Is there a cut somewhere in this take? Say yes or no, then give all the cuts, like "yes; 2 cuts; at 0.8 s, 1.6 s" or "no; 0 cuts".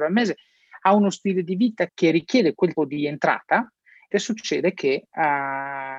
yes; 3 cuts; at 1.9 s, 2.8 s, 4.1 s